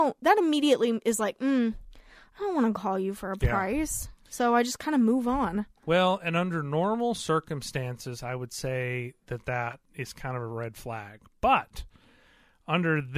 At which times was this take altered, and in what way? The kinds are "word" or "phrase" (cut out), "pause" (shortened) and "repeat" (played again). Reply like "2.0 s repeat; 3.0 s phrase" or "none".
none